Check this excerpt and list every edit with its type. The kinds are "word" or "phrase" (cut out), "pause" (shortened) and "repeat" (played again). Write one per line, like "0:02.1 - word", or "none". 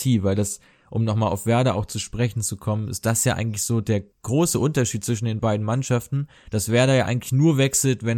0:04.1 - pause